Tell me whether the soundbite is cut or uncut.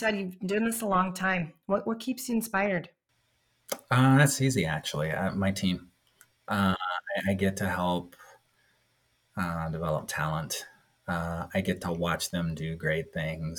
uncut